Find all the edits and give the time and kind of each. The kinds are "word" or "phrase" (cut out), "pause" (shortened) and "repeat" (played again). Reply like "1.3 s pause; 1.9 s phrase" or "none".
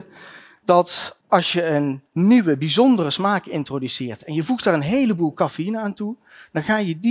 1.2 s pause